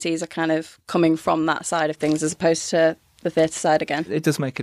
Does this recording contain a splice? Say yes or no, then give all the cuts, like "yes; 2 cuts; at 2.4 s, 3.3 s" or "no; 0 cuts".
no; 0 cuts